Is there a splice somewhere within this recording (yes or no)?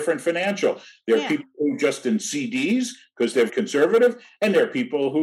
yes